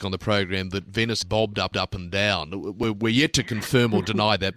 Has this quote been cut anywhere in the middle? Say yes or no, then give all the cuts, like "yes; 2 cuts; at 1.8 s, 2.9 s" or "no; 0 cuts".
yes; 2 cuts; at 1.2 s, 1.7 s